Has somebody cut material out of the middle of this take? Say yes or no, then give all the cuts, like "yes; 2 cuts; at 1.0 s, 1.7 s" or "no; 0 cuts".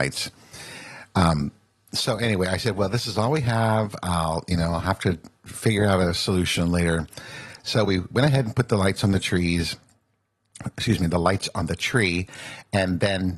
no; 0 cuts